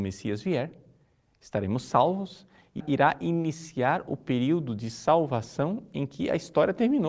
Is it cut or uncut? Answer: cut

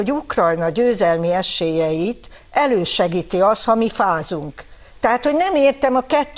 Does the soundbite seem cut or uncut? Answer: uncut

